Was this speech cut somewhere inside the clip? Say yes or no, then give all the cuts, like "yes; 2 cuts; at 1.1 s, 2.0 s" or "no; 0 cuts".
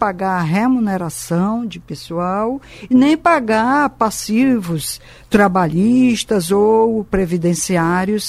no; 0 cuts